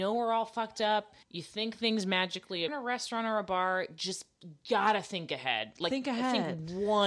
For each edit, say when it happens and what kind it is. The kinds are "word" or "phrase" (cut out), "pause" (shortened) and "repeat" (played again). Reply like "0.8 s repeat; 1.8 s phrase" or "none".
1.2 s pause; 2.7 s phrase